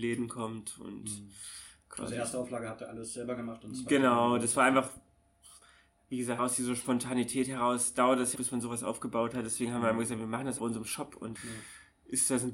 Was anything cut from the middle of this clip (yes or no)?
yes